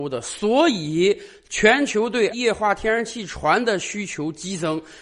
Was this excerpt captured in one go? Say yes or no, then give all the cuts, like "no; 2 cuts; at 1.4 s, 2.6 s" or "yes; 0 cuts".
no; 1 cut; at 2.3 s